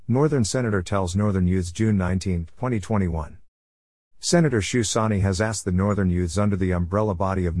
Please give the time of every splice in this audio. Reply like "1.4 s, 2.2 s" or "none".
none